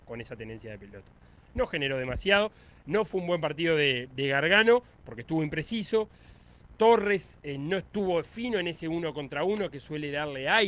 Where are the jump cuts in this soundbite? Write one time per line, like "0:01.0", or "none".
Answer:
none